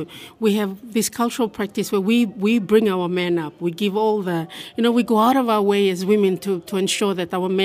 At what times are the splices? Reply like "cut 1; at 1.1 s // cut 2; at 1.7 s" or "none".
none

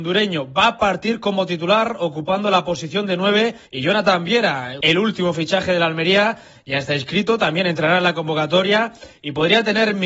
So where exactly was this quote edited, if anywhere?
cut 1; at 3.6 s

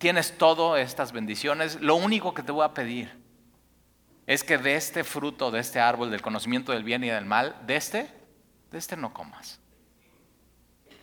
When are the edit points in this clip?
none

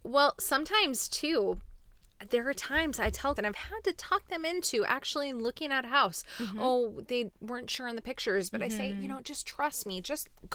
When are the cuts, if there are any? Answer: cut 1; at 3.4 s

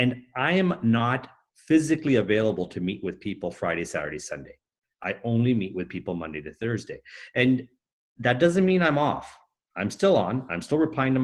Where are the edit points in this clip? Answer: none

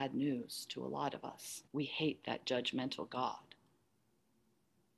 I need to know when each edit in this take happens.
cut 1; at 1.7 s

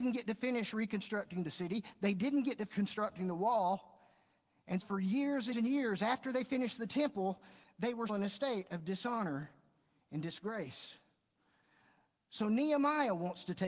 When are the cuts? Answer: cut 1; at 2.7 s // cut 2; at 4.8 s // cut 3; at 5.5 s // cut 4; at 8.1 s

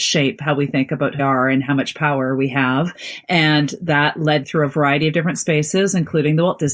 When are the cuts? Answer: cut 1; at 1.2 s // cut 2; at 4.4 s

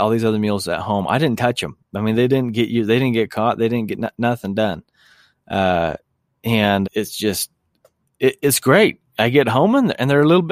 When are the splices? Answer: cut 1; at 6.8 s

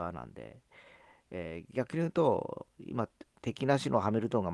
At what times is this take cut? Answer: none

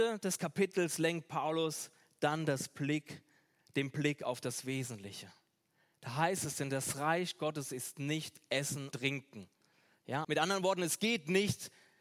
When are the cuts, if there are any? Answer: cut 1; at 8.9 s // cut 2; at 10.2 s

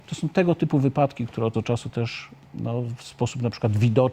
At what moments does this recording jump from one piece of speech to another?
cut 1; at 1.5 s

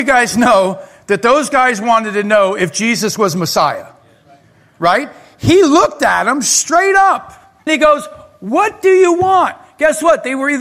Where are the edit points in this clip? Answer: cut 1; at 7.7 s

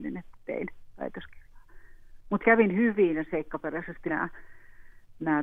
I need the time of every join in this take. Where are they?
cut 1; at 2.4 s // cut 2; at 4.1 s

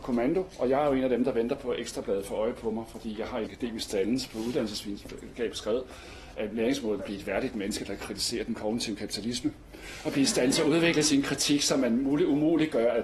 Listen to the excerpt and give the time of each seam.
cut 1; at 3.5 s // cut 2; at 7.0 s

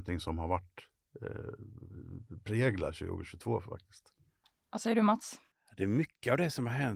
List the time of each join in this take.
none

